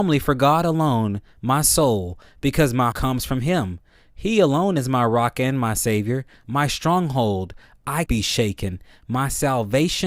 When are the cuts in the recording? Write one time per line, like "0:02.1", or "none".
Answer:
0:02.9
0:08.1